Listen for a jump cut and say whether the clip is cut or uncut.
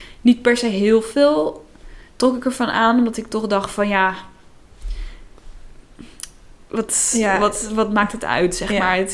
uncut